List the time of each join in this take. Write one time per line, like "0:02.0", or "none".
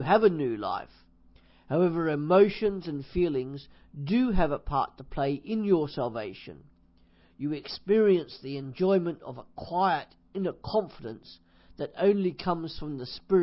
none